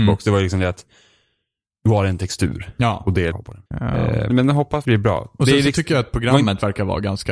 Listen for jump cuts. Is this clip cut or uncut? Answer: cut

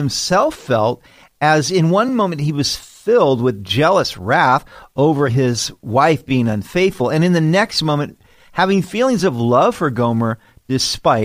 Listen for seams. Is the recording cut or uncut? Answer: uncut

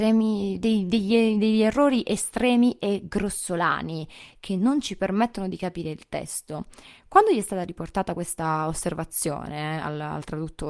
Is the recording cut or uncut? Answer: uncut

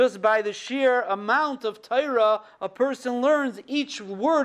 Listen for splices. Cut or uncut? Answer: uncut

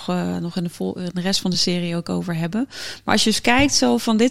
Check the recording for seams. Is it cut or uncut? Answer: uncut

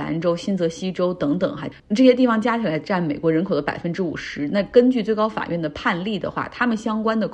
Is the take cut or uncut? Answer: uncut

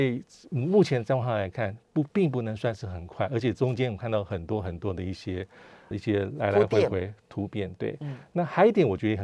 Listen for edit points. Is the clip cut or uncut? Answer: cut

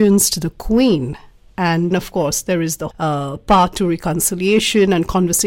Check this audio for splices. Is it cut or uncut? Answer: cut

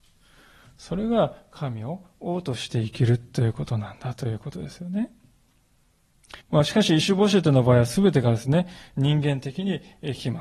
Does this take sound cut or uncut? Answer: cut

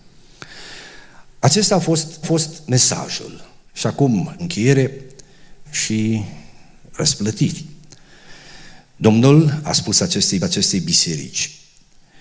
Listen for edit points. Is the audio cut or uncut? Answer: cut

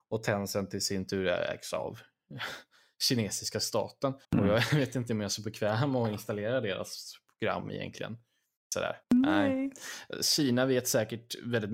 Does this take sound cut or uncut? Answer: cut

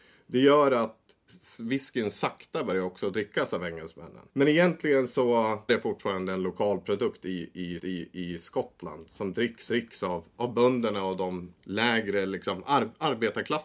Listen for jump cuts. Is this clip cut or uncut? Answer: cut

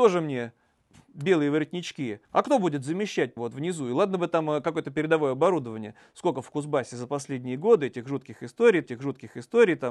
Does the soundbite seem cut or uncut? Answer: cut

